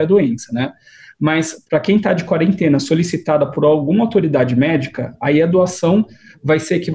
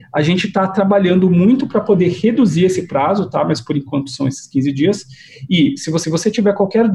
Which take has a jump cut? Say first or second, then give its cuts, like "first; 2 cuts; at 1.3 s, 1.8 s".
second; 1 cut; at 6.0 s